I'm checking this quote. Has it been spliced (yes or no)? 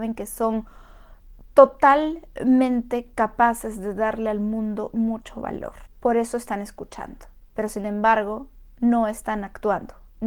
no